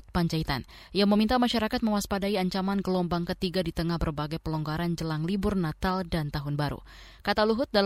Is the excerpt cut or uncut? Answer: uncut